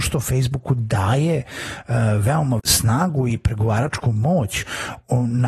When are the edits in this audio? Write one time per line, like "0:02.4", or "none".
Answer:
0:02.6